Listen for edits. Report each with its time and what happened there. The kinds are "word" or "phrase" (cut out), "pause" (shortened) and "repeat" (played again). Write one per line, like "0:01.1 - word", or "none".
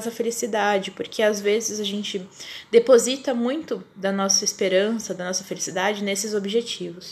none